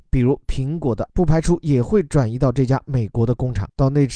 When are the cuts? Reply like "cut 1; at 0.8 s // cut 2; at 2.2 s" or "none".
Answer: cut 1; at 1.1 s